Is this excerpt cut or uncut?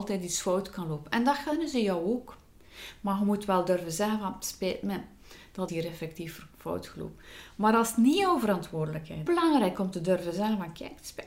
cut